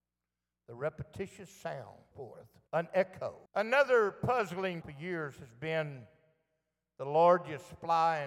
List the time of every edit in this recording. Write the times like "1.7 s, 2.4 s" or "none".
2.1 s, 2.7 s, 3.5 s, 4.8 s